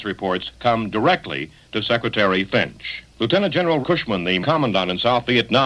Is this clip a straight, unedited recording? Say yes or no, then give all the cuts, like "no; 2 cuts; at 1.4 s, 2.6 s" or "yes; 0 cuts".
no; 2 cuts; at 3.8 s, 4.4 s